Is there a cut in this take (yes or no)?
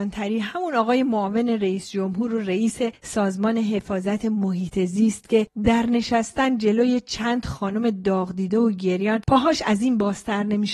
no